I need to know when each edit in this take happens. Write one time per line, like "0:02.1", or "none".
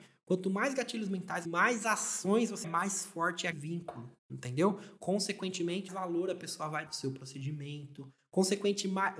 0:01.4
0:02.6
0:03.5
0:04.2
0:05.9
0:06.9